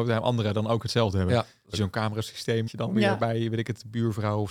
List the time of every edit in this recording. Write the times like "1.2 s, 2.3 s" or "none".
1.7 s, 2.7 s